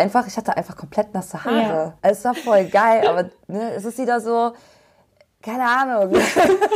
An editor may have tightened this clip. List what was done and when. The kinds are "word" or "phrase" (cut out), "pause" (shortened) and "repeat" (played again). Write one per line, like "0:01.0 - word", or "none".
0:02.0 - pause